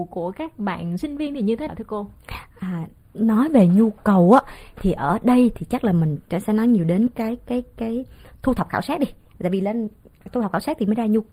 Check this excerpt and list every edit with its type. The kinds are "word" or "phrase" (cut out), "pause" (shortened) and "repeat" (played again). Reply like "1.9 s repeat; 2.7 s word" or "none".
1.7 s word